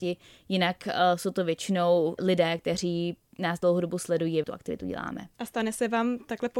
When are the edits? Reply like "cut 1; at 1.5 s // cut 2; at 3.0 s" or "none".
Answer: cut 1; at 2.2 s // cut 2; at 4.4 s // cut 3; at 5.3 s